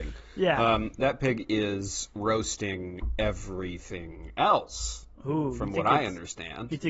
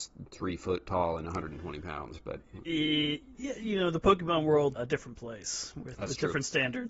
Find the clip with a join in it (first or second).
second